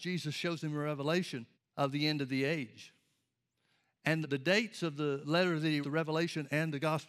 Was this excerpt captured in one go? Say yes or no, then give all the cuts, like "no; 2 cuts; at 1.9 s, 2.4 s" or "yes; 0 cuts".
no; 4 cuts; at 1.5 s, 4.2 s, 5.2 s, 5.8 s